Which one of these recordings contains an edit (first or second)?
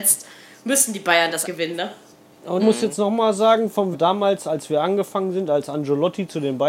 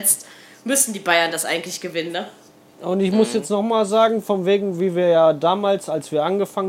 first